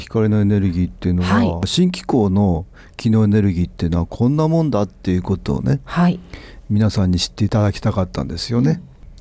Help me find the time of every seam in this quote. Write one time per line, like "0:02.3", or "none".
none